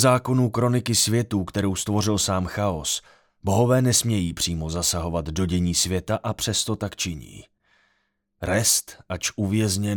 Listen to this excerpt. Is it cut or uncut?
uncut